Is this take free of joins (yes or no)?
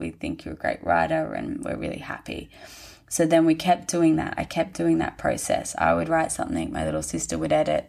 yes